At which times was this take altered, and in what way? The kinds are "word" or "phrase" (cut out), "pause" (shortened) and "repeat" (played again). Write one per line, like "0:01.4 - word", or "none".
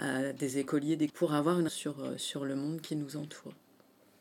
0:01.1 - phrase
0:01.7 - word